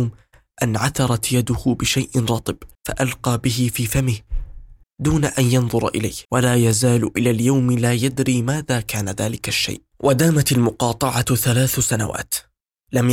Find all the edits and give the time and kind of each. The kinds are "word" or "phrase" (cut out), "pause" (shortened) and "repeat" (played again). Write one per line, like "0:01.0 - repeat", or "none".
0:02.7 - pause
0:04.8 - word
0:06.2 - pause